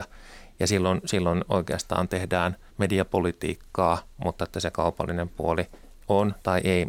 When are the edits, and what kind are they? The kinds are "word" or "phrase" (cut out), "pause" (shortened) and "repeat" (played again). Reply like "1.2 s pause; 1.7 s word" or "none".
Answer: 2.7 s pause